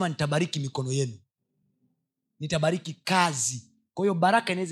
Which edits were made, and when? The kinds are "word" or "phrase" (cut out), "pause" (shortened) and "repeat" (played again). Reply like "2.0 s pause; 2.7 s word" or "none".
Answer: none